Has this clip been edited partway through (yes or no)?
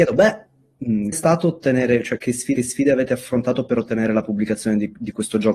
yes